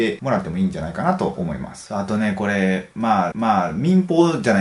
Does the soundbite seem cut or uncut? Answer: cut